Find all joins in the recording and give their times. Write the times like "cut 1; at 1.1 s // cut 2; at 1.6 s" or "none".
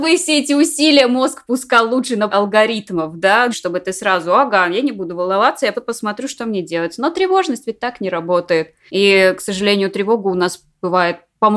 cut 1; at 2.3 s // cut 2; at 3.5 s // cut 3; at 5.7 s